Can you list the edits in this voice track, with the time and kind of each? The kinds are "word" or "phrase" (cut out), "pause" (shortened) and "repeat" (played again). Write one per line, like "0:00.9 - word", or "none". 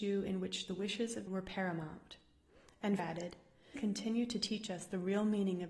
0:01.3 - word
0:03.0 - word
0:03.8 - word